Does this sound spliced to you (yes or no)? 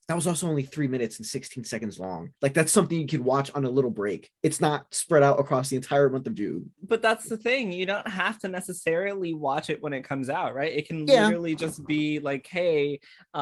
yes